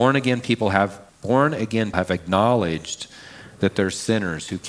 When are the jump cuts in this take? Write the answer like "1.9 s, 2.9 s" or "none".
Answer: 1.1 s, 1.9 s